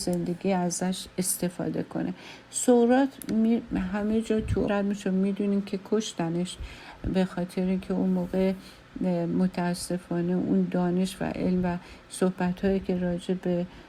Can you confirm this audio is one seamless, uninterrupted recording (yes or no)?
no